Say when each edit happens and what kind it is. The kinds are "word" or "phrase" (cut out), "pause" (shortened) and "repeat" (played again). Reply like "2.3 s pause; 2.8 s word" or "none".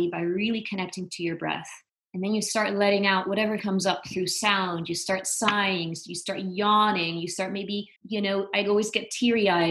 1.9 s pause; 3.6 s word; 8.0 s pause